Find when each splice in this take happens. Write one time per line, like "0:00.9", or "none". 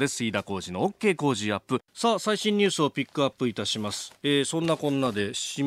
0:01.9